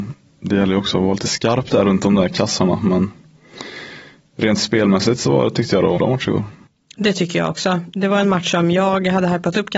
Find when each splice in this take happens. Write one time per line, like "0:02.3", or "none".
0:05.9